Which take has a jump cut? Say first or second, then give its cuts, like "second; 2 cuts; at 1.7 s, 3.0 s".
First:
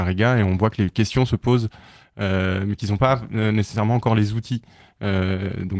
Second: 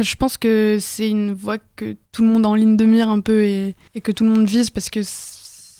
second; 2 cuts; at 2.1 s, 3.9 s